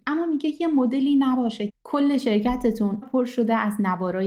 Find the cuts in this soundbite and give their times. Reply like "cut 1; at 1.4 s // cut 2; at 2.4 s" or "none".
cut 1; at 1.7 s // cut 2; at 3.0 s